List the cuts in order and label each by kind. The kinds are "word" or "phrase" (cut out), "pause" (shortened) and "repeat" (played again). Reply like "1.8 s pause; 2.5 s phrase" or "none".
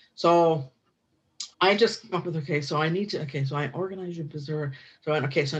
1.5 s pause; 2.1 s word; 4.3 s word